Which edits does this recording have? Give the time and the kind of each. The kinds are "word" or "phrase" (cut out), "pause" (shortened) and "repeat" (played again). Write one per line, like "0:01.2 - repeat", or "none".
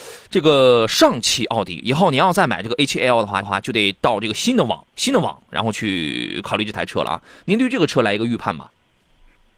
0:03.4 - repeat
0:04.9 - pause